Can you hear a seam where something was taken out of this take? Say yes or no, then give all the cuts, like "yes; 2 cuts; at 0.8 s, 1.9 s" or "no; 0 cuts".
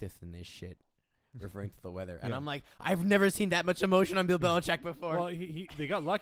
no; 0 cuts